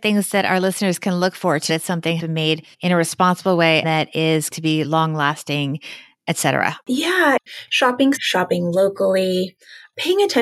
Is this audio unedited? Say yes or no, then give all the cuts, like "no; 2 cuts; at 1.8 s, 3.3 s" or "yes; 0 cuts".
no; 7 cuts; at 1.7 s, 2.2 s, 2.7 s, 3.8 s, 4.5 s, 6.8 s, 8.2 s